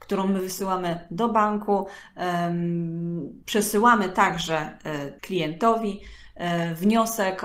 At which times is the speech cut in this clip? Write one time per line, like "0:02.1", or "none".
0:03.4
0:05.2

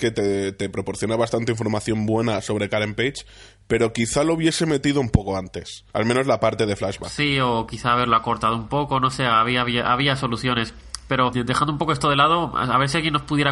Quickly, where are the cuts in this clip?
0:05.9
0:11.3

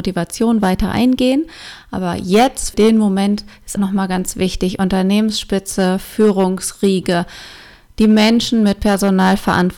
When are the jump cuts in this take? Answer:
0:02.7
0:03.8

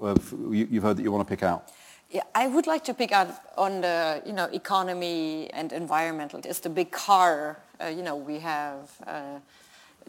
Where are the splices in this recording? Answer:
0:05.5
0:06.4

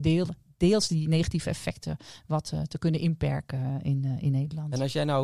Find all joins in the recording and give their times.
none

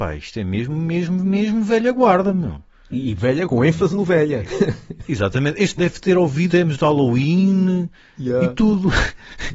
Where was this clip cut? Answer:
0:03.5
0:05.8
0:06.5

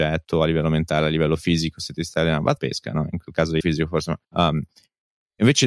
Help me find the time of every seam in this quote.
0:02.6
0:03.6
0:04.2

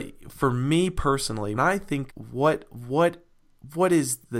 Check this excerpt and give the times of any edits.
0:01.5
0:02.1

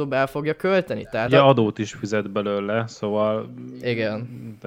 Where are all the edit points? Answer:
0:01.3

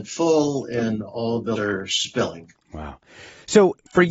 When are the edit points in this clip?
0:01.5

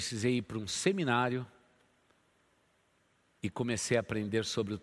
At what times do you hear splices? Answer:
none

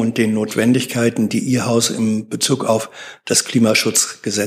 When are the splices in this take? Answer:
none

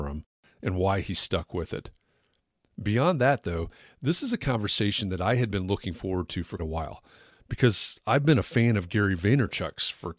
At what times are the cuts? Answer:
0:06.6

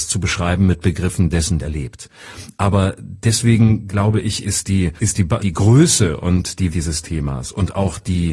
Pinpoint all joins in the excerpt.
0:01.6
0:05.0
0:05.4
0:06.7

